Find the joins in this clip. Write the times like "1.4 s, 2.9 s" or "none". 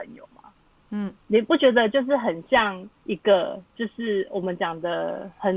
1.2 s, 3.0 s, 3.7 s